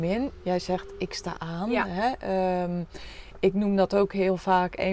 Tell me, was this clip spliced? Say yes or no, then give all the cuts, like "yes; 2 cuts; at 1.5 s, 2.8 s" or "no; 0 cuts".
yes; 1 cut; at 1.4 s